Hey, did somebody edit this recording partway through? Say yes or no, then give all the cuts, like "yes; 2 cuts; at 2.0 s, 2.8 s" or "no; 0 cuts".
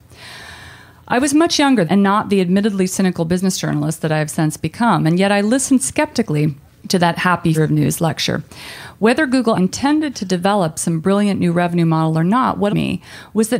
yes; 5 cuts; at 1.8 s, 6.7 s, 7.5 s, 9.5 s, 12.7 s